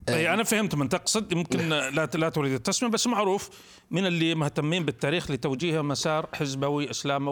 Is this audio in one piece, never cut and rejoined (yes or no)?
yes